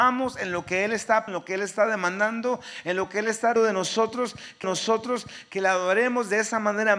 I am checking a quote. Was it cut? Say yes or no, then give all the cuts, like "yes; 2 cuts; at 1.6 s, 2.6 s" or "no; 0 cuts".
yes; 3 cuts; at 1.3 s, 3.6 s, 4.6 s